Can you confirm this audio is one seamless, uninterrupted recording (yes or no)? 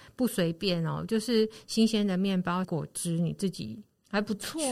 no